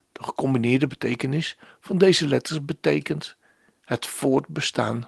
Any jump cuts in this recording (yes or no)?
no